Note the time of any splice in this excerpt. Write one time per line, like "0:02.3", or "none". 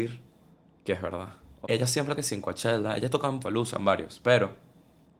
0:01.6
0:02.1
0:03.4